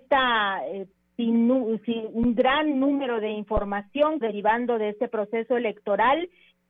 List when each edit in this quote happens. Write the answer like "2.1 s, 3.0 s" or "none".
1.0 s, 4.2 s